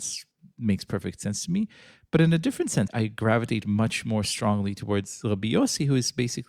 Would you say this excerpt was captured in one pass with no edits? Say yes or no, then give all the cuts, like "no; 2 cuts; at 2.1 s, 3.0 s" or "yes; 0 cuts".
no; 1 cut; at 2.9 s